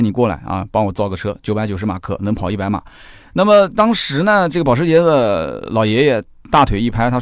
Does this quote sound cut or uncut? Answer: uncut